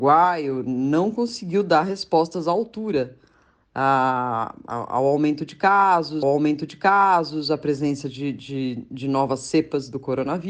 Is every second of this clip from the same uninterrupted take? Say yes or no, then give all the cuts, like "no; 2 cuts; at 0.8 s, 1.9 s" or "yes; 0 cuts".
no; 1 cut; at 6.2 s